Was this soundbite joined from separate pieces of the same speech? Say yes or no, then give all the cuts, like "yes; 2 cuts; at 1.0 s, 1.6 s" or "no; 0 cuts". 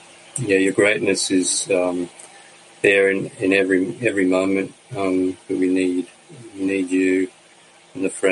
no; 0 cuts